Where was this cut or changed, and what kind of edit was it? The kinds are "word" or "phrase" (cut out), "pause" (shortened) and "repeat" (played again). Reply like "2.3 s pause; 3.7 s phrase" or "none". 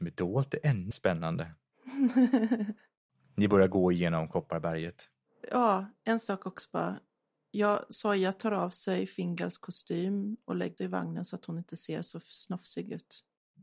0.9 s word; 10.8 s word